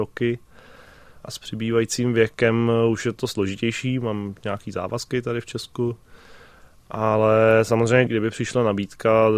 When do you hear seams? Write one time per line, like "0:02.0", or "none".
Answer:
0:08.1